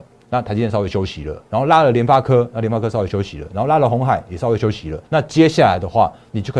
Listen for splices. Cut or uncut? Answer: cut